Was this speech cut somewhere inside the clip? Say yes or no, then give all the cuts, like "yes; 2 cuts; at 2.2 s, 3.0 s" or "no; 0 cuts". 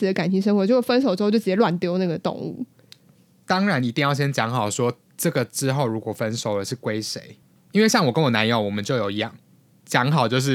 no; 0 cuts